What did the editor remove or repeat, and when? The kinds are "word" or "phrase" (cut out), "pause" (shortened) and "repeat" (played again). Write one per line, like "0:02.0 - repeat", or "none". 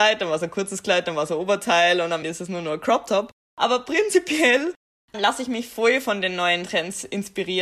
0:02.2 - word
0:05.1 - word